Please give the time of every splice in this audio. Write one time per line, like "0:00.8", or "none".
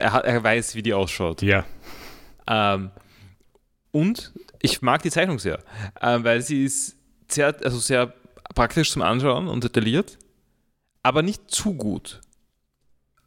none

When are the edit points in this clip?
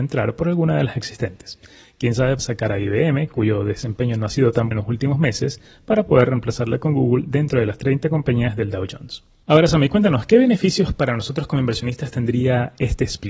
0:02.4
0:04.7

